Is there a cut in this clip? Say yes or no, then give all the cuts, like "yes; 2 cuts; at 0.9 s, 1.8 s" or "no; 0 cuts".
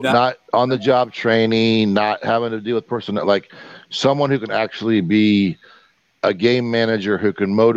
no; 0 cuts